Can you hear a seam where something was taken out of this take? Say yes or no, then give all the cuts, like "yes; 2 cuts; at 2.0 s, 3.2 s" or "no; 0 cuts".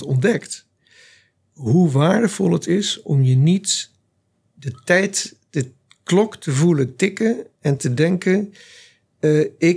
no; 0 cuts